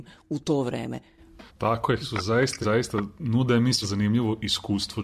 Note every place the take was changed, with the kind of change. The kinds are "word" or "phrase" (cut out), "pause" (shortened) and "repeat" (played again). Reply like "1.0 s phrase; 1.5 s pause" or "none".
1.5 s pause; 2.0 s word; 2.6 s phrase; 3.8 s word